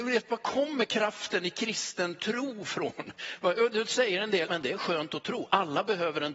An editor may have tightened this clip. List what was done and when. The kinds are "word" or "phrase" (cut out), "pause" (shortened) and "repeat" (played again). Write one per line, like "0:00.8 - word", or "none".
0:04.5 - word